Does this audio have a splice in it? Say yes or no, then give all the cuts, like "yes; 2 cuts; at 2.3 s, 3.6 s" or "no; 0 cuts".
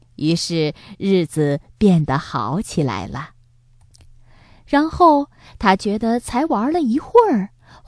no; 0 cuts